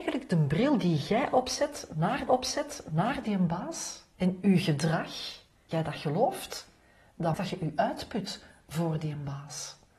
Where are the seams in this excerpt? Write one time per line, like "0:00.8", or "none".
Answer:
0:02.3
0:04.1
0:05.7
0:07.3